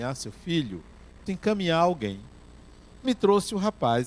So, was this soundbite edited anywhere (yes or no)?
yes